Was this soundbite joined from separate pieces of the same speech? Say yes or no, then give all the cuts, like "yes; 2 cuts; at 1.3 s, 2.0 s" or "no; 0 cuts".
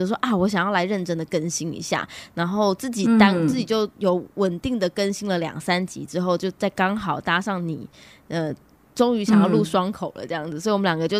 no; 0 cuts